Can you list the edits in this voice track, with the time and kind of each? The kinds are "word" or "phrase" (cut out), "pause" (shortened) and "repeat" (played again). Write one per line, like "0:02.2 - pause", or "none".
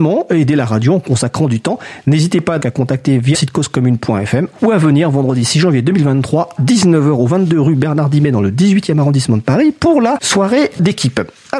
0:02.6 - word
0:03.3 - word
0:06.6 - word